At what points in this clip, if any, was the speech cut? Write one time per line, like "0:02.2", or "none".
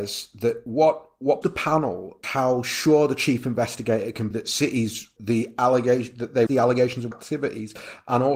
0:01.4
0:02.2
0:04.3
0:05.2
0:06.5
0:07.1